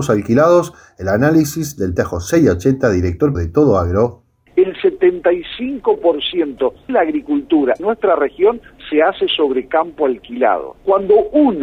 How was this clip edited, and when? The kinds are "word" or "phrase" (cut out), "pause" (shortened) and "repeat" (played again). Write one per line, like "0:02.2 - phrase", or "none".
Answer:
0:02.0 - word
0:03.3 - word
0:06.9 - word
0:07.8 - word